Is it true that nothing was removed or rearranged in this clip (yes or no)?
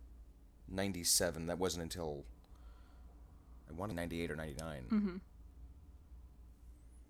no